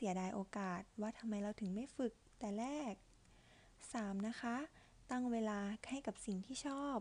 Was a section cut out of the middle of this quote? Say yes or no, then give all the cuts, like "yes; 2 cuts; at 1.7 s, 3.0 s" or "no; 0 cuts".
no; 0 cuts